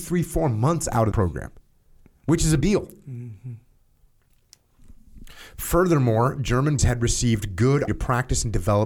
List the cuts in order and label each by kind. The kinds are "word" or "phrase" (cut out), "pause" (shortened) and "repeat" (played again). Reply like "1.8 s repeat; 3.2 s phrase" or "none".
1.1 s word; 2.6 s word; 6.8 s word; 7.9 s word